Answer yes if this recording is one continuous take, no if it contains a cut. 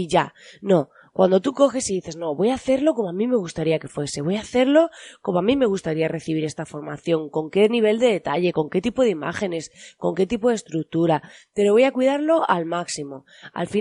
yes